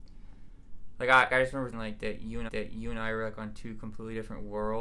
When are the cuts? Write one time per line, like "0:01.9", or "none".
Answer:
0:01.3
0:01.7
0:02.5